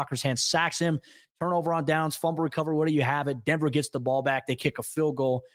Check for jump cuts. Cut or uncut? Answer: uncut